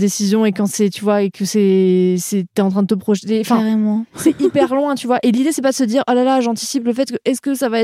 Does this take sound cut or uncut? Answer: uncut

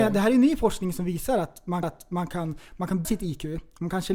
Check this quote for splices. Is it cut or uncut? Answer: cut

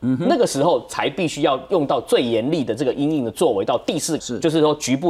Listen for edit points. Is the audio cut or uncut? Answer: cut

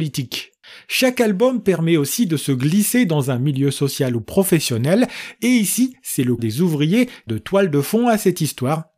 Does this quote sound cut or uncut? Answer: cut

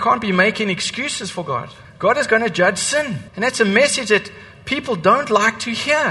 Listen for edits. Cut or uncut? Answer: cut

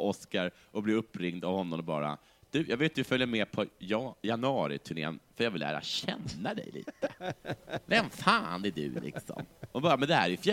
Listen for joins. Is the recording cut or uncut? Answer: uncut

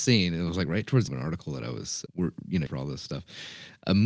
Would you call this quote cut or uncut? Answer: cut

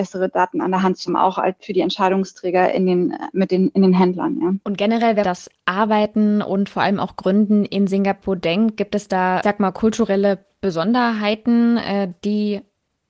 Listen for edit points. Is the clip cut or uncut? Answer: cut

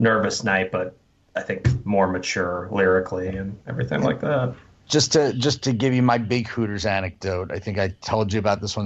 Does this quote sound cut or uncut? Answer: uncut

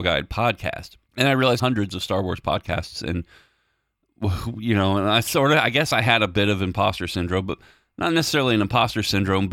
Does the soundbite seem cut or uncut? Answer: cut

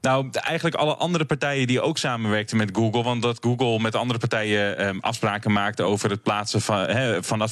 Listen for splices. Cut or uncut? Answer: uncut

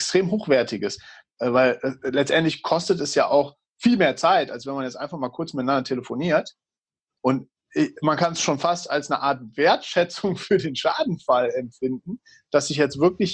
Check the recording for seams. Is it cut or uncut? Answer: uncut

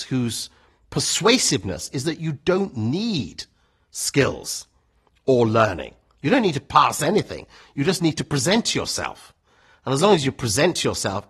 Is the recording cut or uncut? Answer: uncut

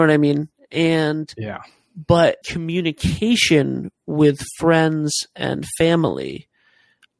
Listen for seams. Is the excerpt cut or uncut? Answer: cut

